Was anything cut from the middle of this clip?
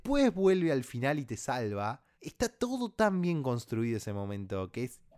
yes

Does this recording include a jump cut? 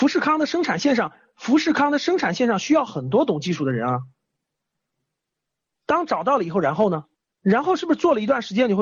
no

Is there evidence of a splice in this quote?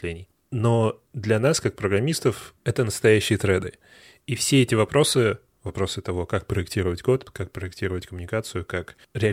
no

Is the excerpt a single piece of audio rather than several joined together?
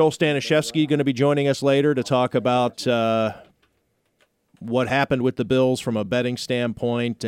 yes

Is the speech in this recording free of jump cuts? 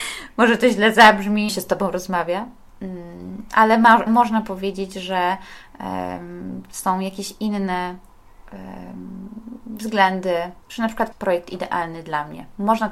no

